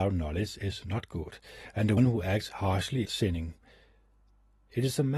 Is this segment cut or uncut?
cut